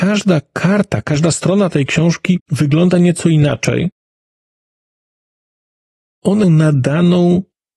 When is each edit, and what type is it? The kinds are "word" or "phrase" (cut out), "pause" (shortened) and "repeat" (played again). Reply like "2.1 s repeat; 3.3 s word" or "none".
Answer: 2.4 s pause; 6.4 s word

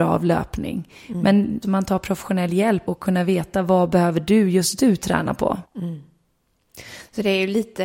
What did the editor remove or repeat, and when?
1.6 s phrase; 2.9 s word; 5.6 s pause

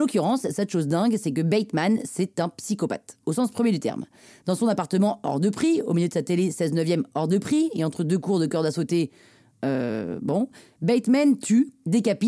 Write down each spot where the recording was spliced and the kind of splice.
none

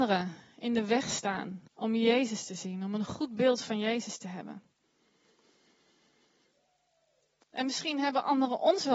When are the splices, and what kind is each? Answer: 1.7 s pause

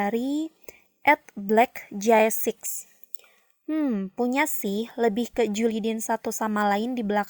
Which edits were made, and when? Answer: none

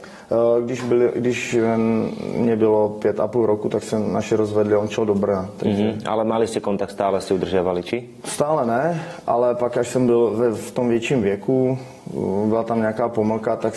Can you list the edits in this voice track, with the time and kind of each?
none

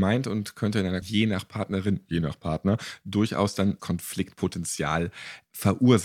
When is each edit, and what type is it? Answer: 1.0 s word; 3.8 s word

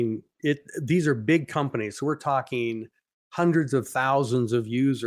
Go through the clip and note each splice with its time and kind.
none

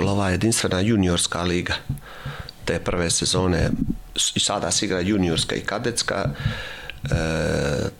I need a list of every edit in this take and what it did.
none

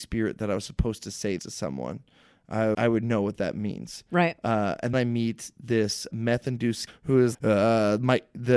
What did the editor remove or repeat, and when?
1.4 s word; 2.7 s word; 4.9 s word; 6.1 s word; 6.9 s word; 7.3 s word

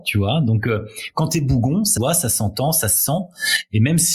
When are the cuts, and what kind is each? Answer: 2.0 s word

